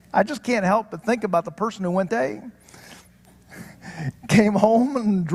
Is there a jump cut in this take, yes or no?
yes